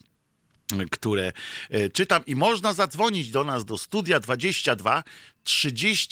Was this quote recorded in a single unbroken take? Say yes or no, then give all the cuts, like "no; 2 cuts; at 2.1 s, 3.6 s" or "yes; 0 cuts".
yes; 0 cuts